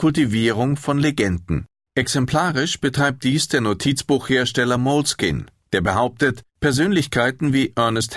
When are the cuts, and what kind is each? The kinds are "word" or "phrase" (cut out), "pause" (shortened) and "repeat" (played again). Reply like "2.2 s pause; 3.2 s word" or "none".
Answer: 1.7 s pause; 6.5 s pause